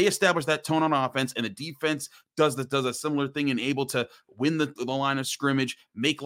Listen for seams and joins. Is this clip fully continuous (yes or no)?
yes